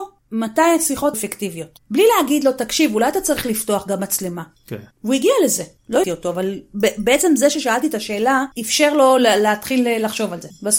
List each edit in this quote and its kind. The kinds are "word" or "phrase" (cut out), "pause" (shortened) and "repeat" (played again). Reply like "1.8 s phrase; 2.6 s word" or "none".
1.1 s phrase; 6.0 s word; 8.5 s pause